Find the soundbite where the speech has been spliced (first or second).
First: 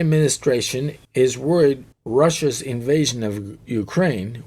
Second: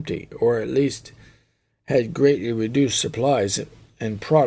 first